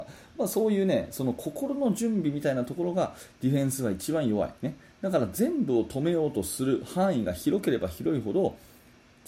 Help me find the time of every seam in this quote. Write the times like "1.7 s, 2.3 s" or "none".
4.6 s